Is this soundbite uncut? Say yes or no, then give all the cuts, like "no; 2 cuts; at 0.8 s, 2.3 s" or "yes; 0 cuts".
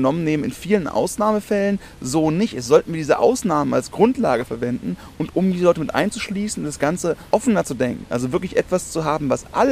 no; 1 cut; at 7.3 s